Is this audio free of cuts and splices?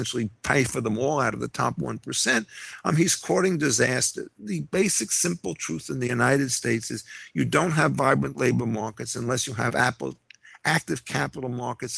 yes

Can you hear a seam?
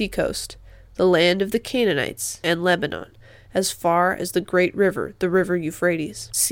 no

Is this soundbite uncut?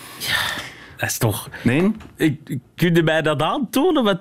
yes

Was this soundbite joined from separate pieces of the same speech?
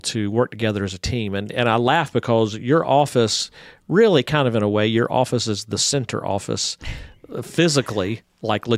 no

